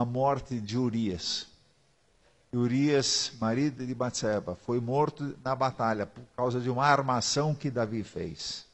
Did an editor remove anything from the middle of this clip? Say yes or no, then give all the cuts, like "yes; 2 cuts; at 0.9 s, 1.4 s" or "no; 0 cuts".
no; 0 cuts